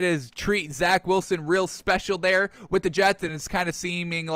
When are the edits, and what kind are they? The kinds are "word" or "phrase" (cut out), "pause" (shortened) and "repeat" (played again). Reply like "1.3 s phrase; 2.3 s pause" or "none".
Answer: none